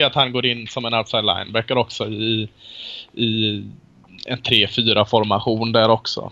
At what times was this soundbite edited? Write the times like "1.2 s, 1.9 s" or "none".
none

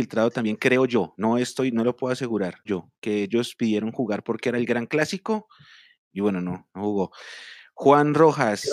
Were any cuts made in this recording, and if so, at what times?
2.7 s, 6.0 s

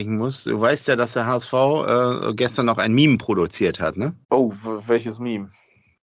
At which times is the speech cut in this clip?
4.2 s

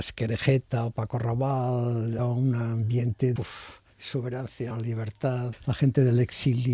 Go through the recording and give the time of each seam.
2.2 s, 3.4 s, 4.7 s, 5.5 s

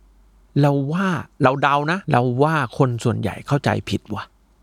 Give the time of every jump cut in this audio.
2.0 s

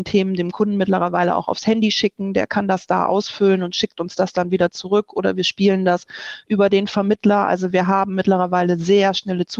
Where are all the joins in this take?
none

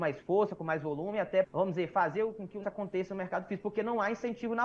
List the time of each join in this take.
1.4 s, 2.6 s

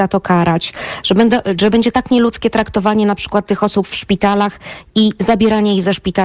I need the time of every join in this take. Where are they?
none

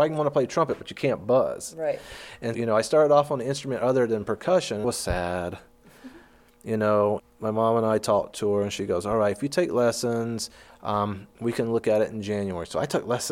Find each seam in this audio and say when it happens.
2.5 s, 4.8 s, 7.2 s

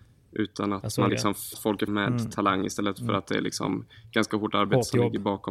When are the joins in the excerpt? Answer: 1.1 s, 1.5 s, 1.9 s

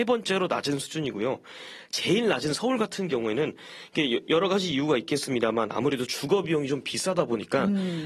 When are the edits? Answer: none

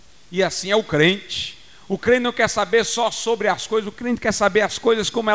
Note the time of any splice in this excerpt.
none

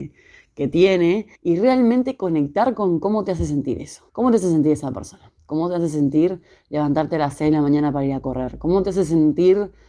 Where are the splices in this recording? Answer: 1.3 s, 4.1 s

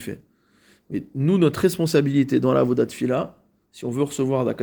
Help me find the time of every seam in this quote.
none

